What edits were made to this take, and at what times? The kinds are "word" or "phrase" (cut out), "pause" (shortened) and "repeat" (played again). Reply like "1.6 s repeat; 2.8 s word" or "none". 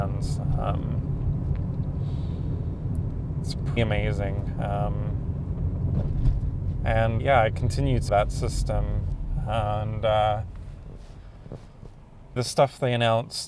3.8 s word; 7.2 s word; 8.1 s word; 12.4 s word